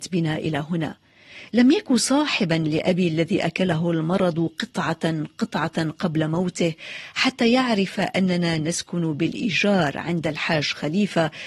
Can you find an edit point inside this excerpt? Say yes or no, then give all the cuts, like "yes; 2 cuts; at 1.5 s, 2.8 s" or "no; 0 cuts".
no; 0 cuts